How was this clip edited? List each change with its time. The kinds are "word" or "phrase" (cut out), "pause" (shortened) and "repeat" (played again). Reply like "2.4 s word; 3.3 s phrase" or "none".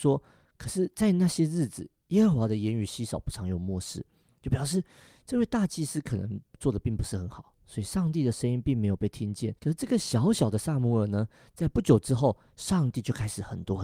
9.6 s pause

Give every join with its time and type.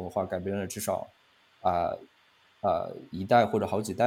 none

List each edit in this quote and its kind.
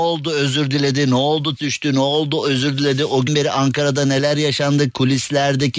1.6 s word; 3.3 s word

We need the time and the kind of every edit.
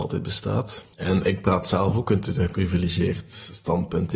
0.9 s pause

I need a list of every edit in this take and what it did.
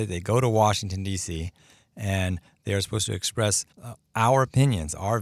3.7 s pause

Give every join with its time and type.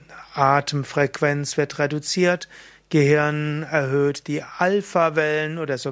none

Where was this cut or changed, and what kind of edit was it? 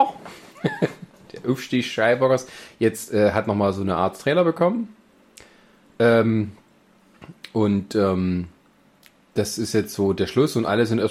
none

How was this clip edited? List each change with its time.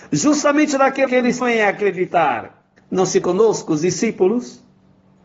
1.1 s word; 1.4 s word; 2.8 s pause; 3.2 s word

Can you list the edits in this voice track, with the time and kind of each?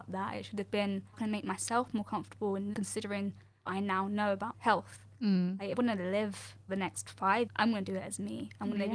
1.1 s word; 2.7 s word; 3.7 s word; 4.5 s word; 5.8 s word; 6.7 s word; 7.5 s word

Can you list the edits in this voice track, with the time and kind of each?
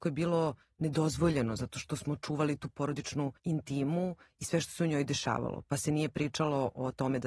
3.4 s pause

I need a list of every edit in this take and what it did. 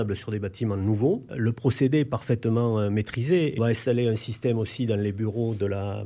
3.6 s phrase

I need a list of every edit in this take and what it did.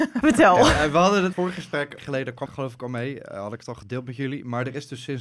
1.3 s phrase; 2.0 s phrase; 2.5 s word

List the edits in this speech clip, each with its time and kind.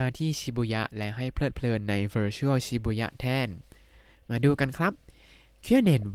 none

